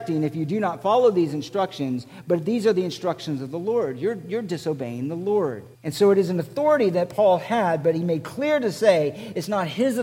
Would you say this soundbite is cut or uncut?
cut